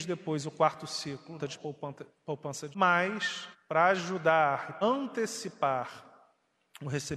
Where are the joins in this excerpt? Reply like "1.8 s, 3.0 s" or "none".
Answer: 1.4 s, 2.7 s, 3.5 s, 4.8 s